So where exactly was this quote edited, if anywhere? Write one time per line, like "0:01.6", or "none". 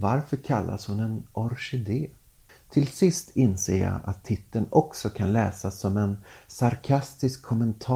none